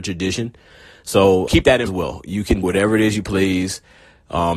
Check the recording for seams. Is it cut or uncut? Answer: cut